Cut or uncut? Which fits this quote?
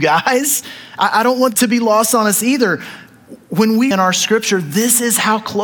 cut